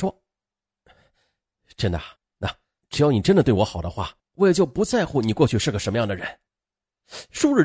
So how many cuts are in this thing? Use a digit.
3